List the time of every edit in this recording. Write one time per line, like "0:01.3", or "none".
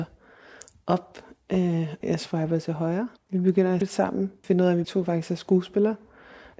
0:02.0
0:03.2
0:03.8
0:04.4
0:04.8